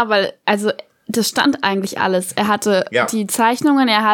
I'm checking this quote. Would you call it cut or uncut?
uncut